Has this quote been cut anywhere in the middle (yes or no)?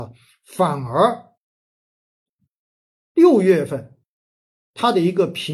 no